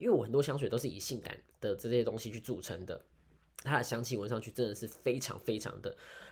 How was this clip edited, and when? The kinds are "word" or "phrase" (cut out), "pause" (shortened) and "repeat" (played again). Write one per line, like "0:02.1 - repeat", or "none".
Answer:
0:01.5 - pause
0:03.6 - phrase